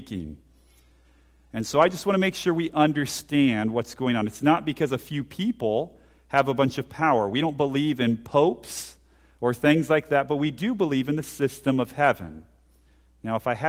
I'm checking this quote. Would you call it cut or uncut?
uncut